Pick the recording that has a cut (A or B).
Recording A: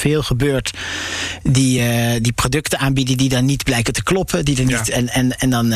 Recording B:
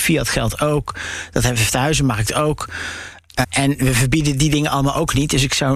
B